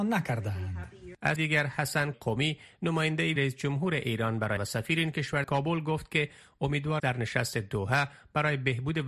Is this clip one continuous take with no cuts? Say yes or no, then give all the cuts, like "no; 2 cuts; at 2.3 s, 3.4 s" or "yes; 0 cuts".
no; 6 cuts; at 1.4 s, 2.1 s, 3.4 s, 4.6 s, 5.4 s, 7.0 s